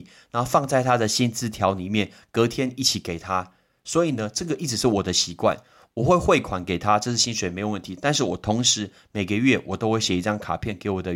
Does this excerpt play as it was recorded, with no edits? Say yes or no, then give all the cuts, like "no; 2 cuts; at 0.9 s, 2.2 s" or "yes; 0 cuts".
yes; 0 cuts